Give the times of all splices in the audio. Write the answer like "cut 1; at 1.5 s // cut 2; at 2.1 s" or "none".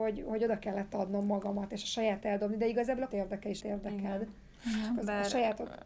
cut 1; at 2.2 s // cut 2; at 3.1 s // cut 3; at 3.6 s